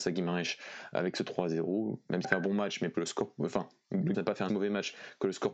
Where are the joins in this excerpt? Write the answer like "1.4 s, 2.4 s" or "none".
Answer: 2.2 s, 2.9 s, 4.1 s, 4.5 s

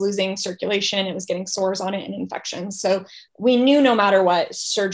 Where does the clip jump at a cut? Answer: 3.3 s

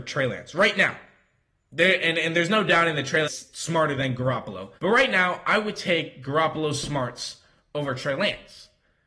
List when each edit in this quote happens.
3.2 s, 4.8 s

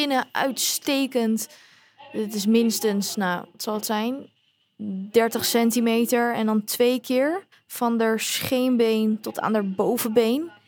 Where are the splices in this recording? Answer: 7.5 s

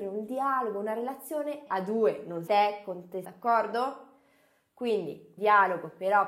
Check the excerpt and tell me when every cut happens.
1.7 s, 2.5 s, 3.2 s, 5.4 s

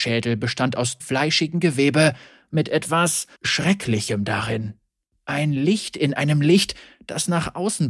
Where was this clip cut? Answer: 1.0 s, 3.3 s

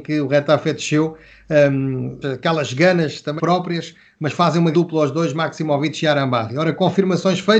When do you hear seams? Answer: 2.2 s, 3.4 s, 4.7 s

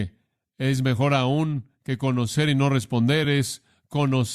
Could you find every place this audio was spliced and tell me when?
none

